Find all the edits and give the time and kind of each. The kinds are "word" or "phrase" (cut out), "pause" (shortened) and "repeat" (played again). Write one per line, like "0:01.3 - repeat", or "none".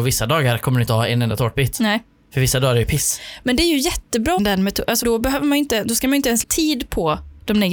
0:04.4 - word
0:05.0 - word
0:06.4 - word